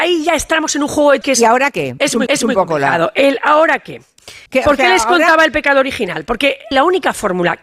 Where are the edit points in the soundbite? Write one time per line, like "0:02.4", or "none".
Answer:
0:01.2
0:02.3
0:04.5
0:06.7